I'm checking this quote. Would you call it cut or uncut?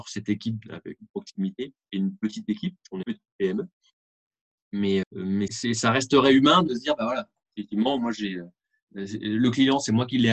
cut